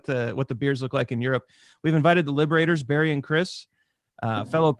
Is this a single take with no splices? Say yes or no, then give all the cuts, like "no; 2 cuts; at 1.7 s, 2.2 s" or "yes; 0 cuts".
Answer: yes; 0 cuts